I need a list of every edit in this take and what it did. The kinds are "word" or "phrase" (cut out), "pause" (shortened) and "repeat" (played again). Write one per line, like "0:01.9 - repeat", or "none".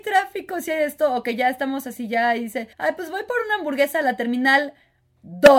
0:02.7 - pause